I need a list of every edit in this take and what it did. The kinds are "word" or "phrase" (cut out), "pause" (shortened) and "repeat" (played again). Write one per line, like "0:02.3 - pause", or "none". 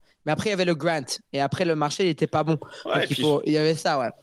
none